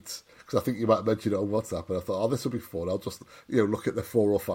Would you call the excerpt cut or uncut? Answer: uncut